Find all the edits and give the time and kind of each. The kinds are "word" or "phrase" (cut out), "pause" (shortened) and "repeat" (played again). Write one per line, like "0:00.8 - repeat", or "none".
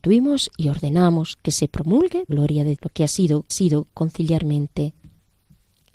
0:02.3 - word
0:02.8 - word
0:03.5 - repeat